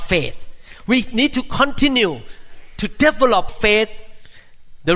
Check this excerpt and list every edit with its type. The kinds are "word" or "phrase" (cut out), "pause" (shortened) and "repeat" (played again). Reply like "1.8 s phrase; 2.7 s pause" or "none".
3.5 s word